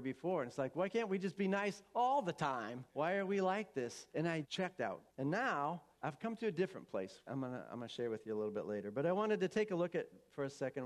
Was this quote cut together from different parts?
yes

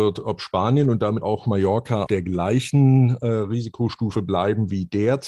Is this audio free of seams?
no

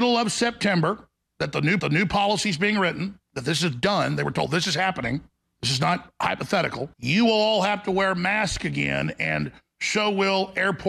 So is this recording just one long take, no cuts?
no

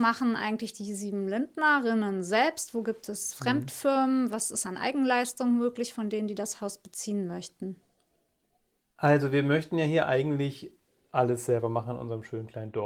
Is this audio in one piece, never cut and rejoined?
yes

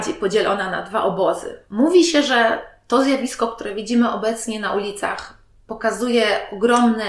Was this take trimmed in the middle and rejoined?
no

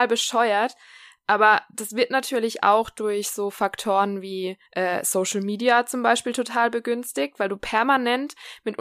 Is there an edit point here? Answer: yes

